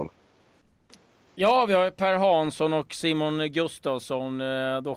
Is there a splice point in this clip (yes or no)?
no